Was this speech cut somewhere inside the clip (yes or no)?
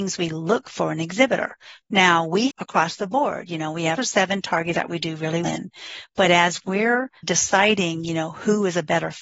yes